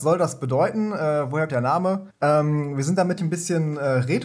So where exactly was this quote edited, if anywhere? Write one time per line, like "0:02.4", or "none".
0:01.5
0:02.1
0:03.2